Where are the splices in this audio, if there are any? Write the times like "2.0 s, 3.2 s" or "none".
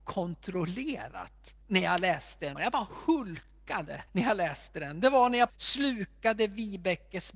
1.6 s, 2.6 s, 4.1 s, 5.5 s